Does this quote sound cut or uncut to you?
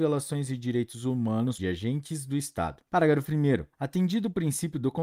cut